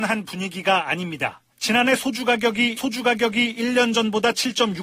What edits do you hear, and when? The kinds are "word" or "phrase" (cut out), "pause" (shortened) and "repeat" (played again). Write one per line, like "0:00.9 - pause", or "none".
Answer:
0:01.5 - pause
0:02.8 - repeat